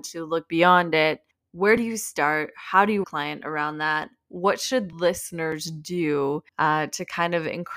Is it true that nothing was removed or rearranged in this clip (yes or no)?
no